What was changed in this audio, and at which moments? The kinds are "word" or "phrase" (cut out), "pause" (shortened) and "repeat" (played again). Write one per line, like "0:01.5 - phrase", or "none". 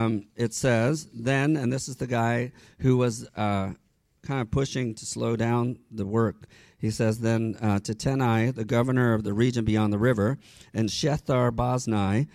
none